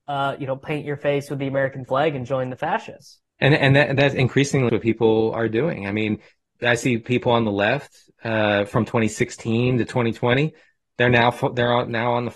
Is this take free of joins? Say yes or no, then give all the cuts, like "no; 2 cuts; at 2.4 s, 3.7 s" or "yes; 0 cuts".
no; 3 cuts; at 3.3 s, 4.7 s, 6.6 s